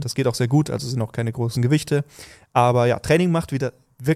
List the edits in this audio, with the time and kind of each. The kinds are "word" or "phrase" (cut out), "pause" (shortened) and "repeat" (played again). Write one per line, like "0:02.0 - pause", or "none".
none